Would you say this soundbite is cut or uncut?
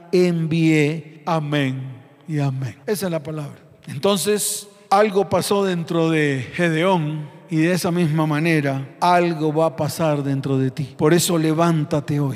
uncut